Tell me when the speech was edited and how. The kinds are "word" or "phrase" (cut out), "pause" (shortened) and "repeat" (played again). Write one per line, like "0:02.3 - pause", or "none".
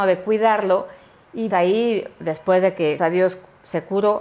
0:01.5 - word
0:03.0 - word